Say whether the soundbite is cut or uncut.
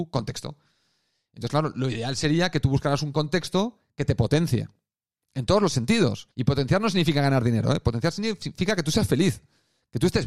cut